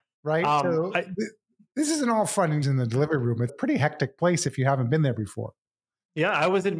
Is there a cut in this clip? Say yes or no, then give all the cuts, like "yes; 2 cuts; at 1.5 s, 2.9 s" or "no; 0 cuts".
yes; 2 cuts; at 2.6 s, 3.5 s